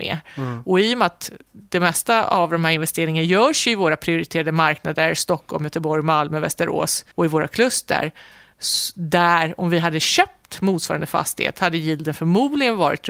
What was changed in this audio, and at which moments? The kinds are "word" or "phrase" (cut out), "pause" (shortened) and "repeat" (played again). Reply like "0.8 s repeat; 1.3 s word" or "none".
7.1 s pause